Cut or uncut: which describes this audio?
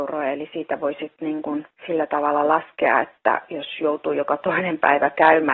cut